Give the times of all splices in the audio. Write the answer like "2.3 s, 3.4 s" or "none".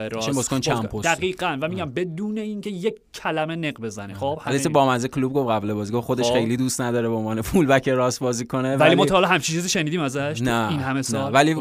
none